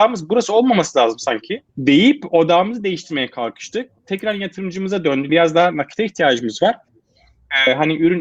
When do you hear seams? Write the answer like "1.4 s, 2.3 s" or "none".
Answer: 1.7 s, 4.0 s, 5.3 s